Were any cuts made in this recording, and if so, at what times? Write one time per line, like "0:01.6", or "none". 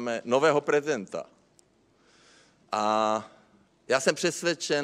none